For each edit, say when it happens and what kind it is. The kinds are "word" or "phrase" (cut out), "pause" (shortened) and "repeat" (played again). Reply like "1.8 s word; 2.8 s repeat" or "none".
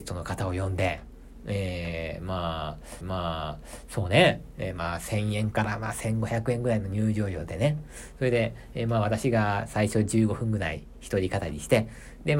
3.0 s repeat